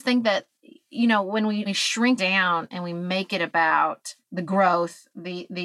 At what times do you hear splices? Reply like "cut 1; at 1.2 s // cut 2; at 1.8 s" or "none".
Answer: cut 1; at 1.7 s // cut 2; at 2.2 s // cut 3; at 4.2 s